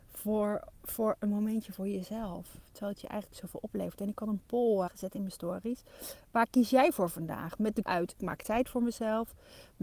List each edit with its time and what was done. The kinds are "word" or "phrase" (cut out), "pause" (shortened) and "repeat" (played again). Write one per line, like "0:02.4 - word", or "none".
0:04.9 - word
0:07.9 - word
0:08.2 - word